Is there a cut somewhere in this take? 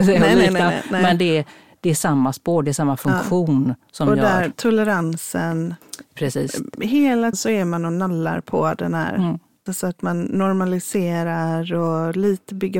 yes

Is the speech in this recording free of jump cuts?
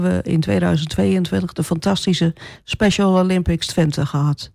yes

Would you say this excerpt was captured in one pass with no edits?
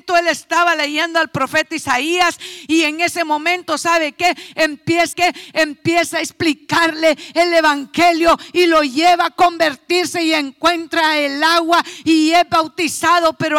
no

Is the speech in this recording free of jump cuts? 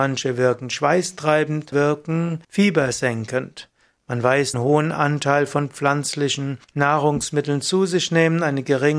no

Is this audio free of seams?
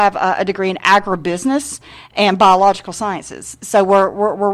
yes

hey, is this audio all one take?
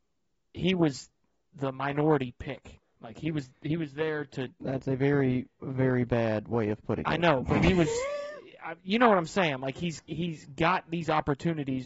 yes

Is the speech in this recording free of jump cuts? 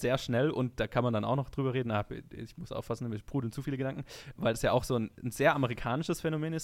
no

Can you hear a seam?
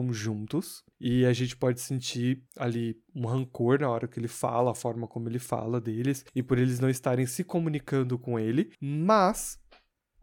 yes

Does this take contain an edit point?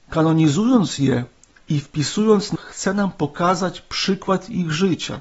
yes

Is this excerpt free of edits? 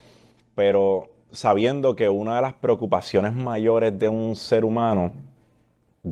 yes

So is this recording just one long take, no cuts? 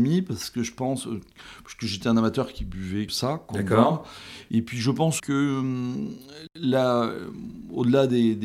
no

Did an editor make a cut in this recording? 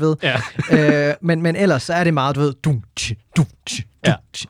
no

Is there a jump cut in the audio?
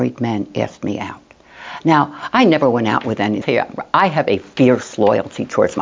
yes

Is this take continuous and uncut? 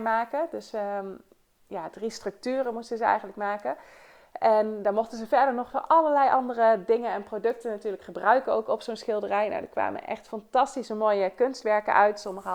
yes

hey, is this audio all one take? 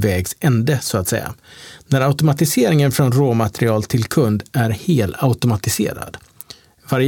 yes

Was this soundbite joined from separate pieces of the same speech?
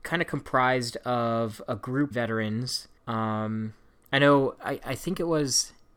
yes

